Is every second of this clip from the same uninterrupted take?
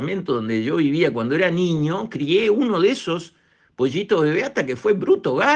yes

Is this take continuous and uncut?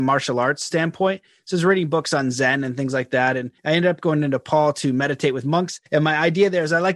no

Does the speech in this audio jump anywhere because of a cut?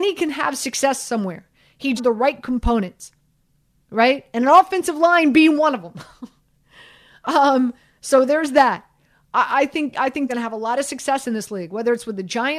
yes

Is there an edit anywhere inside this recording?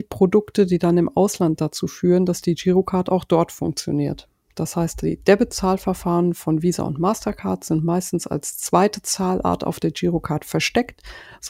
no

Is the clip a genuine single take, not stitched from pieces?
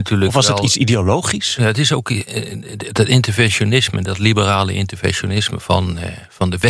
yes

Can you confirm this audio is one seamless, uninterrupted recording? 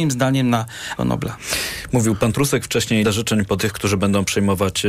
no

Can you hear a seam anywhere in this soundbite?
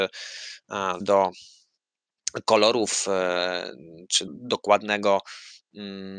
yes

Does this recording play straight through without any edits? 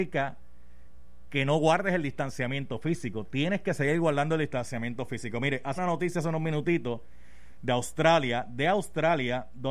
no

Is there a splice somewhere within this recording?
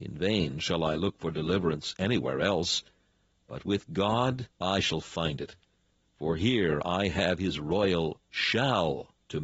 yes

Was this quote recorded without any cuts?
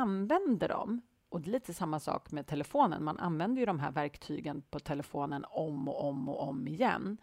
yes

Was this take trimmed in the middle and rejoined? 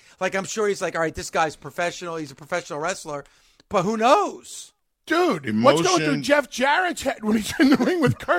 no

